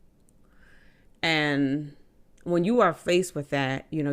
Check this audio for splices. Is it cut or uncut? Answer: uncut